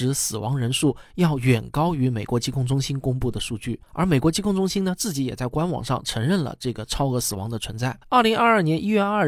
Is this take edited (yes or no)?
yes